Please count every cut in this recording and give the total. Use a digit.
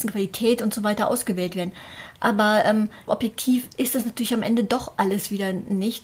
1